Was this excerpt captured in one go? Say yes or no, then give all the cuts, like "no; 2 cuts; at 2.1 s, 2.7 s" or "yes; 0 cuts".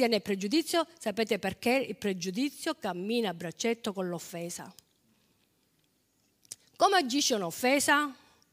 yes; 0 cuts